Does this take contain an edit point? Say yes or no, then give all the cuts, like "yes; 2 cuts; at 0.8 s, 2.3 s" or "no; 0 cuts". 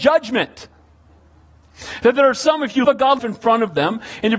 yes; 2 cuts; at 2.8 s, 3.2 s